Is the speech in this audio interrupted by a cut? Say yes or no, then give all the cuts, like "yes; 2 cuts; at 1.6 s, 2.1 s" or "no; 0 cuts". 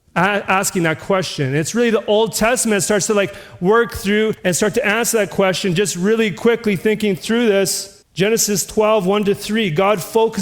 yes; 2 cuts; at 4.4 s, 8.0 s